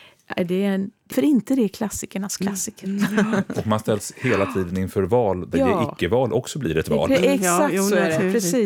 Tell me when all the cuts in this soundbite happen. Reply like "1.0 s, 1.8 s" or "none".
1.1 s, 5.5 s

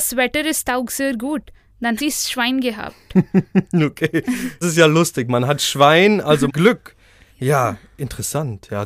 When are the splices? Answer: 2.0 s, 4.6 s, 6.5 s

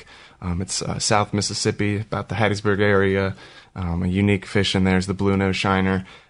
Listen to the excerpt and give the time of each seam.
none

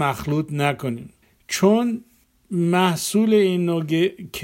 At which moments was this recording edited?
none

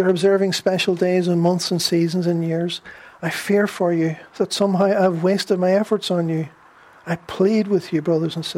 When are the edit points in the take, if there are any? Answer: none

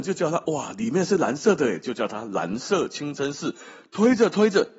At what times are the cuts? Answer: none

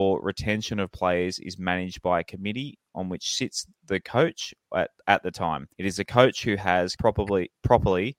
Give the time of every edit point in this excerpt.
5.7 s, 7.0 s

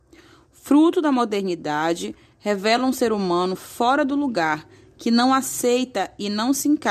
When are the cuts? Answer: none

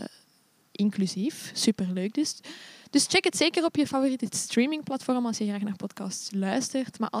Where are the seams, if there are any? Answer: none

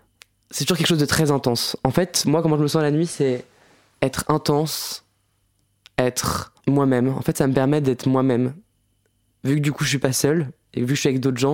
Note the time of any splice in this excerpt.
6.6 s

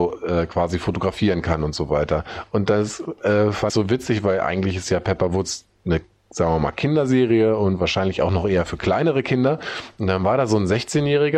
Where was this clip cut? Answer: 3.7 s

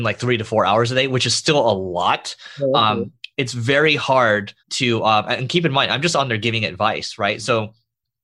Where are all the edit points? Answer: 3.3 s, 4.6 s

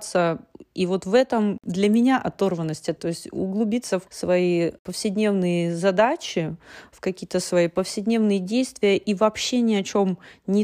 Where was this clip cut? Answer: 3.0 s, 4.1 s

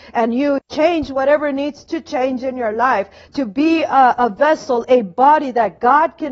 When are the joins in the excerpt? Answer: none

